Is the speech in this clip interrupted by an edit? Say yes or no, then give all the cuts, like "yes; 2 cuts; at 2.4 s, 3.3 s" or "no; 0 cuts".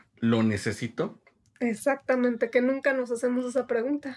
no; 0 cuts